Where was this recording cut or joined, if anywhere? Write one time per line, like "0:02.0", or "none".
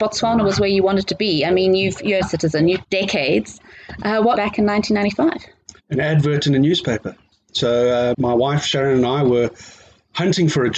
0:02.2
0:02.8
0:04.3
0:05.8
0:08.1